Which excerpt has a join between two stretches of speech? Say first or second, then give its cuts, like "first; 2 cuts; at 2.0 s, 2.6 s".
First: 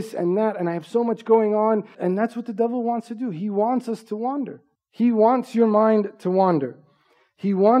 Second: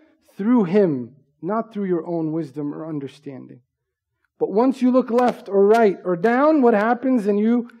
first; 2 cuts; at 1.9 s, 4.8 s